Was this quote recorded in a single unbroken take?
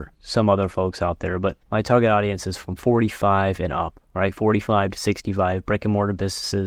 no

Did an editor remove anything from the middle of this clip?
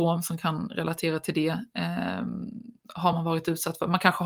no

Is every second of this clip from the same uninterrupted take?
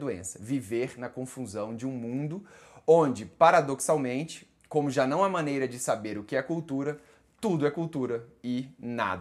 yes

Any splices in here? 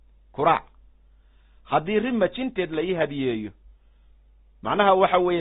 no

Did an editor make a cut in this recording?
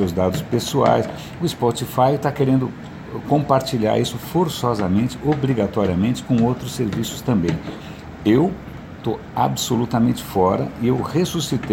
no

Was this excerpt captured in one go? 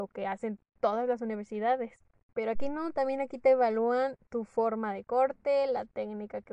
yes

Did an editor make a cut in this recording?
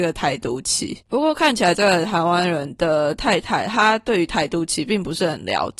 yes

